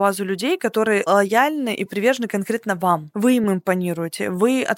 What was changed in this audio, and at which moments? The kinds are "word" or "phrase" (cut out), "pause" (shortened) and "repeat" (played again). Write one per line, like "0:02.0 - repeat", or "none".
none